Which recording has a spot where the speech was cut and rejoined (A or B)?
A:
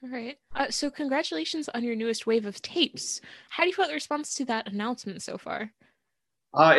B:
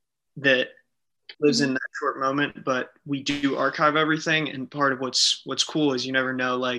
B